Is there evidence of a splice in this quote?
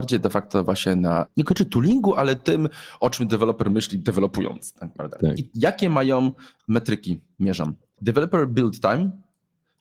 no; 0 cuts

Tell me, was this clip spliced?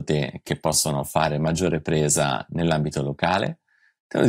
no; 0 cuts

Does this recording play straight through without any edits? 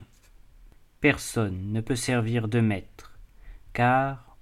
yes; 0 cuts

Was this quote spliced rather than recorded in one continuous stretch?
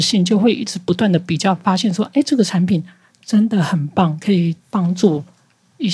yes; 1 cut; at 4.6 s

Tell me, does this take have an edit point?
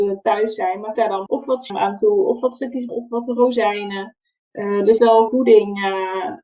yes; 6 cuts; at 0.9 s, 1.3 s, 1.7 s, 2.9 s, 5.0 s, 5.3 s

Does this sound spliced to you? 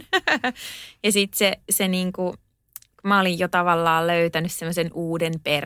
no; 0 cuts

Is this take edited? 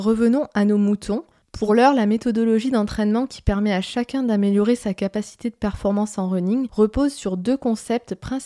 no; 0 cuts

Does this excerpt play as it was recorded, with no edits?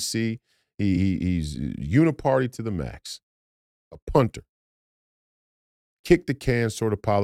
yes; 0 cuts

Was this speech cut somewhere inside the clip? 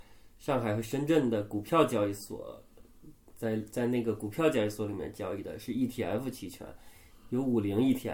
no; 0 cuts

